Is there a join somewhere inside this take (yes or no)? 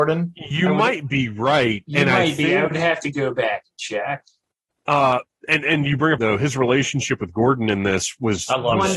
yes